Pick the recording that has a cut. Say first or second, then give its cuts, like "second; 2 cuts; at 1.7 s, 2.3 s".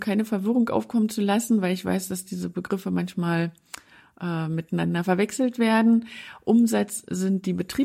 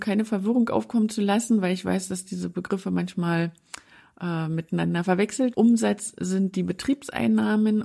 second; 1 cut; at 5.5 s